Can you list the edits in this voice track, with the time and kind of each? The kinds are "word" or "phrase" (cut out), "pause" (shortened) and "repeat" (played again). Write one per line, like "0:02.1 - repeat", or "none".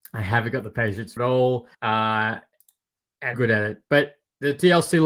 0:01.2 - word
0:01.7 - pause
0:03.3 - phrase